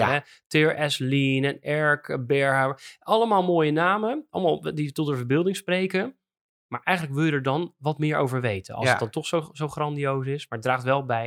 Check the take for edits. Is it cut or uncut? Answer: uncut